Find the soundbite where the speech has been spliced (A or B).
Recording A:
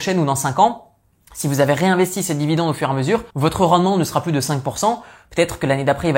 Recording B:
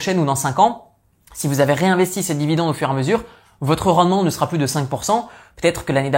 A